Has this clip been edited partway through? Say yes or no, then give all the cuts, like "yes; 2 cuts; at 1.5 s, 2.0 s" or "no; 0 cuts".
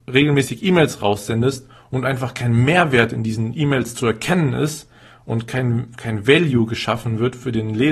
no; 0 cuts